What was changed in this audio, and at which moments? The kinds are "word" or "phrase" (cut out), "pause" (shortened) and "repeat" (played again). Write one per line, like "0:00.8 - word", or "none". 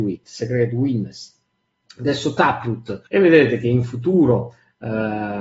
0:03.1 - pause